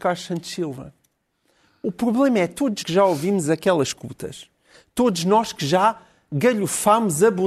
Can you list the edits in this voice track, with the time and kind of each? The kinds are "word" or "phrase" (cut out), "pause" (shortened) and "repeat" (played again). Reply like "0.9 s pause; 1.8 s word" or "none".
2.8 s word